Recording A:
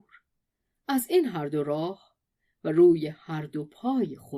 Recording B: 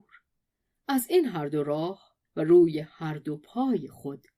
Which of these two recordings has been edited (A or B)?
B